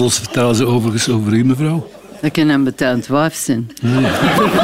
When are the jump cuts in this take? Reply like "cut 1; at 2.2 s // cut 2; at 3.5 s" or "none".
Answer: none